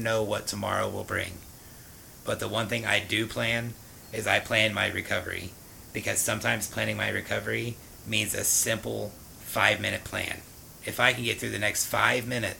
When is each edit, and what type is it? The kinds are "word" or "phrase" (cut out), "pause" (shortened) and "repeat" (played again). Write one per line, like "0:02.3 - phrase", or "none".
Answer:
none

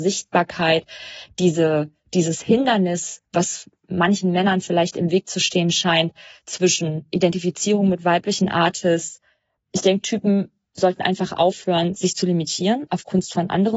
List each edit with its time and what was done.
none

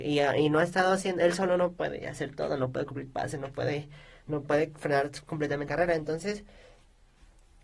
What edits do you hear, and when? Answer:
0:05.7 - word

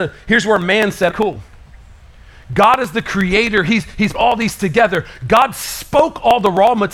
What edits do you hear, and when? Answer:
0:01.1 - word
0:04.1 - word
0:04.6 - word

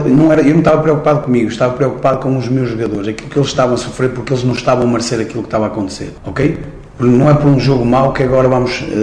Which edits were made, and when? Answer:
none

